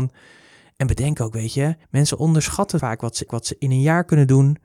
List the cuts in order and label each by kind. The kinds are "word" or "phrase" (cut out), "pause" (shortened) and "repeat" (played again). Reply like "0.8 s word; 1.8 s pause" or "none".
1.8 s pause; 3.3 s repeat